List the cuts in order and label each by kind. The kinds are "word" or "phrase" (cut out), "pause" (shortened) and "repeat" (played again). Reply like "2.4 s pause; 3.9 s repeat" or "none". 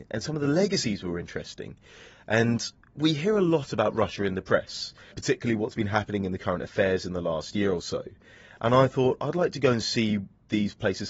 5.1 s word